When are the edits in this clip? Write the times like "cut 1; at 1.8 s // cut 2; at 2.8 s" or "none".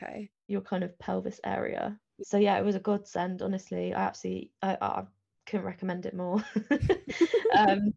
none

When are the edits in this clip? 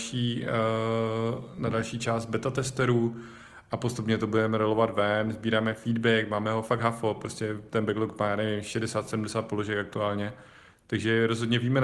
none

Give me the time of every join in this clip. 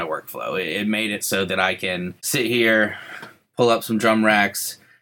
cut 1; at 2.2 s

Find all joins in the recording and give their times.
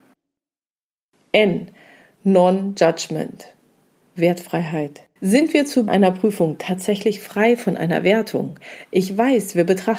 cut 1; at 5.2 s // cut 2; at 5.9 s

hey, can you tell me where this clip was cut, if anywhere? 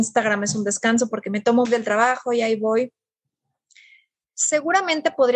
cut 1; at 1.6 s

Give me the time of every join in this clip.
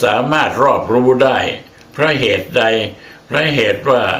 none

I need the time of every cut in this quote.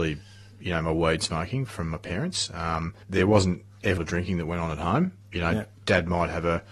cut 1; at 1.7 s // cut 2; at 3.0 s // cut 3; at 4.0 s // cut 4; at 5.2 s

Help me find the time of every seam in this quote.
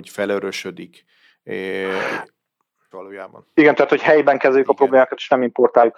cut 1; at 2.9 s // cut 2; at 3.7 s

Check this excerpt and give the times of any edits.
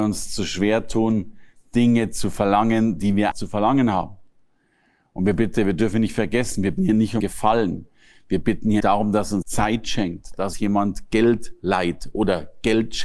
cut 1; at 3.3 s // cut 2; at 6.8 s // cut 3; at 7.2 s // cut 4; at 8.8 s // cut 5; at 9.4 s // cut 6; at 10.5 s

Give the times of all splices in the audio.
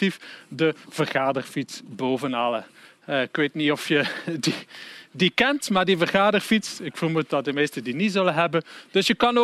none

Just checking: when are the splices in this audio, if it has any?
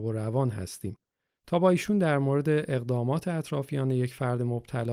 none

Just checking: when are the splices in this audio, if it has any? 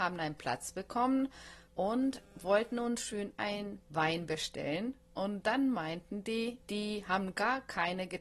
cut 1; at 1.7 s // cut 2; at 6.6 s

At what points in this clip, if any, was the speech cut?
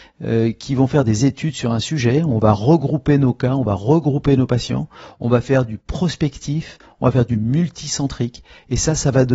none

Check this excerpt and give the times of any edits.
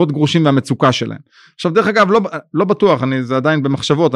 none

